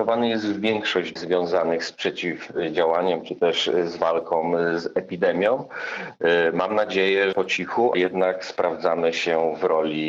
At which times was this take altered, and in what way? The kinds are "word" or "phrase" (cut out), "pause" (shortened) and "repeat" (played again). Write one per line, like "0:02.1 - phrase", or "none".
0:01.2 - word
0:07.3 - word
0:07.9 - word